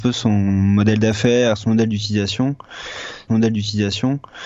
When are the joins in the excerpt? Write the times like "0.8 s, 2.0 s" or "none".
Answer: 3.3 s